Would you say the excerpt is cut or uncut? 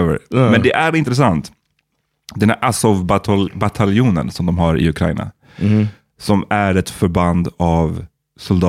uncut